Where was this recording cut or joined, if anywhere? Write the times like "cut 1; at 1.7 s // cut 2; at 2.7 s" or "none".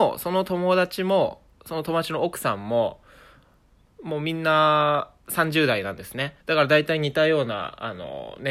cut 1; at 6.4 s